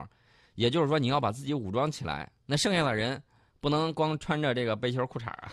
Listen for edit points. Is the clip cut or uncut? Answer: uncut